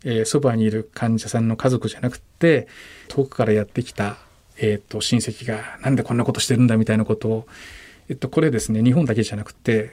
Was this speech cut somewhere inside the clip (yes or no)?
yes